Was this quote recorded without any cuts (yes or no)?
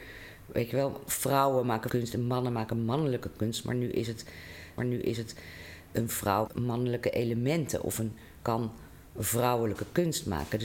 no